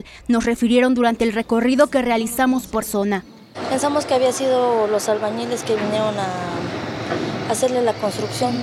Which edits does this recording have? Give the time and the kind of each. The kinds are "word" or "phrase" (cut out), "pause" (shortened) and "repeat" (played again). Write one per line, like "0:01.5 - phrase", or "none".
0:02.8 - word